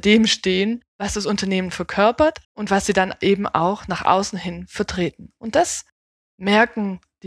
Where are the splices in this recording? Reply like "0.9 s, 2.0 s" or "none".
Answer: 0.9 s, 2.4 s